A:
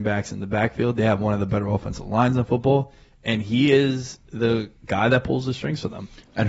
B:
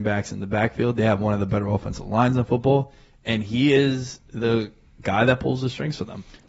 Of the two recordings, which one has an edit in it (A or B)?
A